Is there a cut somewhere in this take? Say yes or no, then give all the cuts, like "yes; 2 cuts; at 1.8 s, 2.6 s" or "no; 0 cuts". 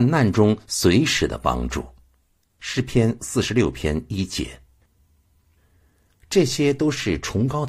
no; 0 cuts